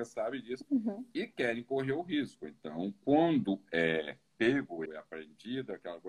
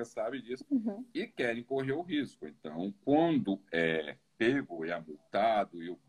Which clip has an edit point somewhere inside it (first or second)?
first